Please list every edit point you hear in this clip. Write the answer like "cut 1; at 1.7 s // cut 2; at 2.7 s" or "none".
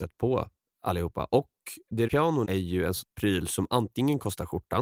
cut 1; at 2.1 s // cut 2; at 2.4 s // cut 3; at 3.0 s